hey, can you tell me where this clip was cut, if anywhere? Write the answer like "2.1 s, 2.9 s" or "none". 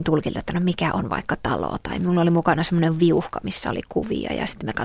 none